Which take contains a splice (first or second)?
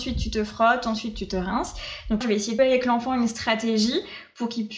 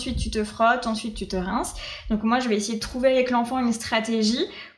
first